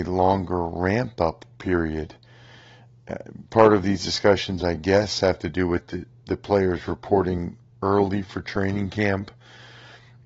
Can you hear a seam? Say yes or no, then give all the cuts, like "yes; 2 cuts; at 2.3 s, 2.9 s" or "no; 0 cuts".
no; 0 cuts